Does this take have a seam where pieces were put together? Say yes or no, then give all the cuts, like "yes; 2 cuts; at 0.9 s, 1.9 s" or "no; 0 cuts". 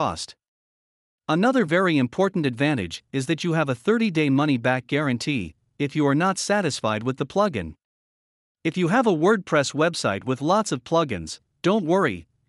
no; 0 cuts